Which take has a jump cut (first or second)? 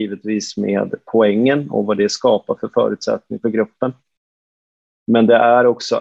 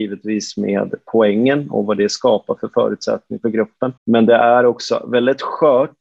second